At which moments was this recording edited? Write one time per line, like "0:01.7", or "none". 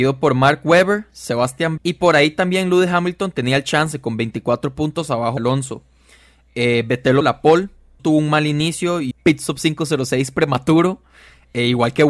0:01.8
0:05.4
0:07.2
0:08.0
0:09.1